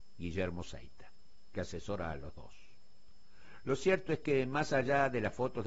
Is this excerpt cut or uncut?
uncut